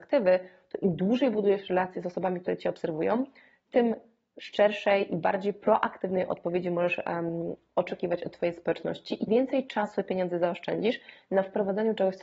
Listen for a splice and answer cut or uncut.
cut